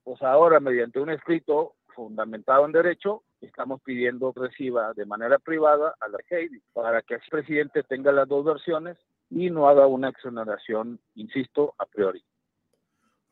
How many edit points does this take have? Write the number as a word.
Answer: six